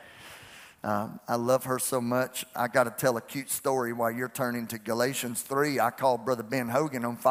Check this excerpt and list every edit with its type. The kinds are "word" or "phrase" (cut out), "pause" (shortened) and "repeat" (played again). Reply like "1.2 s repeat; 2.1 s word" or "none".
none